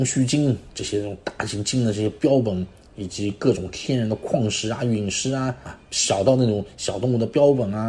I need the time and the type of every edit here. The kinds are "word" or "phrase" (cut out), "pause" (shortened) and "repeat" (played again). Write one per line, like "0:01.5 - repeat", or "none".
none